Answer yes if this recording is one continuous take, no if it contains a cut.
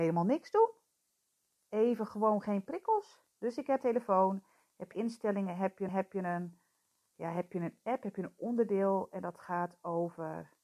no